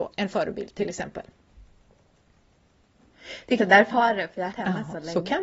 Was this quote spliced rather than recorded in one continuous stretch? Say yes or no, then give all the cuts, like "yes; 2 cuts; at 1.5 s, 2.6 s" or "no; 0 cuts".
yes; 3 cuts; at 3.6 s, 3.9 s, 4.5 s